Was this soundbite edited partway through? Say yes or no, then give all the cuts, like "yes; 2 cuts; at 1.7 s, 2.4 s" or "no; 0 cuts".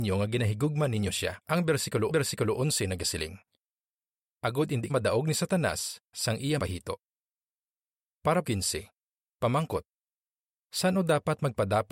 yes; 6 cuts; at 1.4 s, 2.1 s, 4.9 s, 6.1 s, 6.6 s, 8.4 s